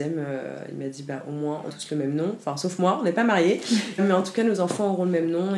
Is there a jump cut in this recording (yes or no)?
yes